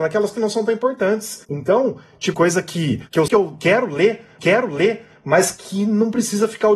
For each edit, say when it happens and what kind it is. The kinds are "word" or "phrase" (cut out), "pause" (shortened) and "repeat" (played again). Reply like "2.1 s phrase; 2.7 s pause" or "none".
2.3 s word; 3.3 s word; 4.4 s repeat